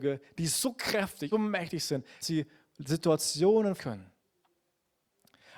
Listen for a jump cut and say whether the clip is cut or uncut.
cut